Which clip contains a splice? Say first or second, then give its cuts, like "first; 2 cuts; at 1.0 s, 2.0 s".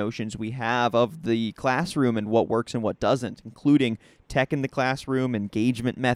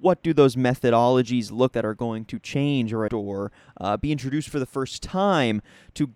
second; 2 cuts; at 1.7 s, 3.1 s